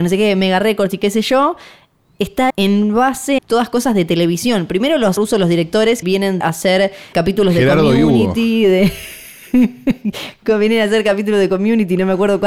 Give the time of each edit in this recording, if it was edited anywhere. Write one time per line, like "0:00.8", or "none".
0:02.5
0:03.4
0:05.2
0:06.0
0:06.4
0:07.1

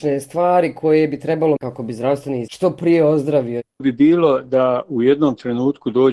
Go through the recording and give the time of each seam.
0:01.6
0:02.5
0:03.8

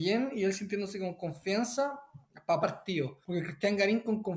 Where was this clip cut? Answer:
0:02.6
0:03.2

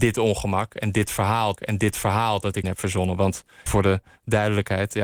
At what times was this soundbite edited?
0:01.6
0:02.6
0:03.7

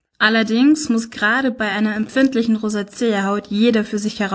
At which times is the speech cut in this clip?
none

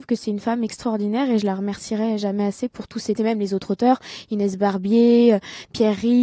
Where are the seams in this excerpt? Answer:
0:03.2

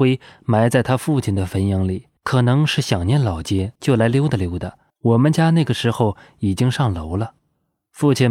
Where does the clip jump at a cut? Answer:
0:02.2
0:03.8
0:04.9

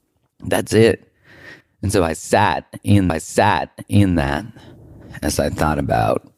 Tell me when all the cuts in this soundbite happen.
0:01.6
0:03.1

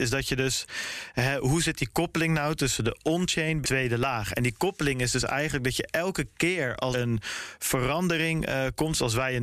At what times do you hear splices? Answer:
0:03.6
0:06.9

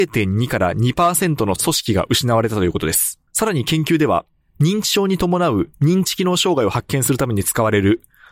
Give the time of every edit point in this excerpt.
0:03.3

